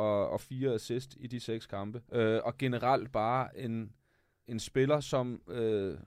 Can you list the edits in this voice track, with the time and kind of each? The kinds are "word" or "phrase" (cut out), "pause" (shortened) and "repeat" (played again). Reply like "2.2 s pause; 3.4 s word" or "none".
2.1 s pause; 4.5 s word

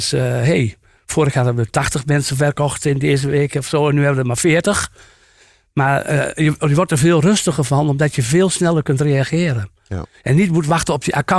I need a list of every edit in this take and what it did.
none

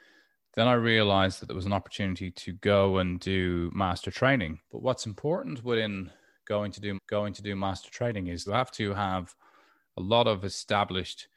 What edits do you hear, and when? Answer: 4.7 s pause; 6.9 s repeat; 8.5 s phrase

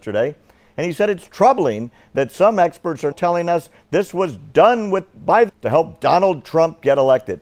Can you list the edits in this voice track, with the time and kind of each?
3.1 s word; 5.5 s word

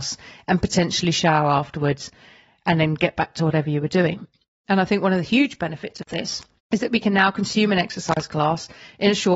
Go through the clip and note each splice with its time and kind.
none

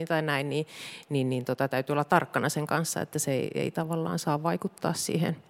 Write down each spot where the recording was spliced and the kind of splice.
none

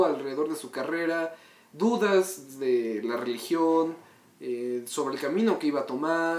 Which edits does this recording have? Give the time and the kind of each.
none

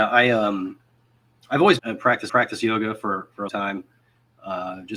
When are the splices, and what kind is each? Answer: 1.8 s word; 2.3 s repeat; 3.5 s word

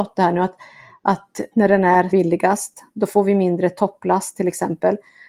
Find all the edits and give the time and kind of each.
1.5 s phrase; 2.1 s word

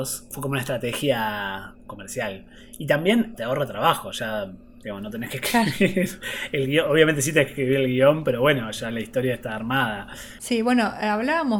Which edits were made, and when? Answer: none

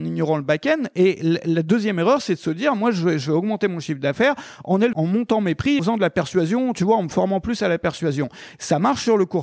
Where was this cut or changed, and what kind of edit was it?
4.9 s word; 5.8 s word

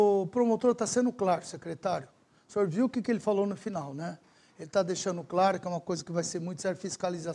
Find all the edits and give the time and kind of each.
none

